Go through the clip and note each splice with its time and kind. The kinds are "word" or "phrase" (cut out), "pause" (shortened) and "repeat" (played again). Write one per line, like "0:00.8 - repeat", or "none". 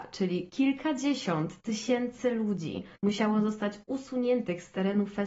0:02.9 - pause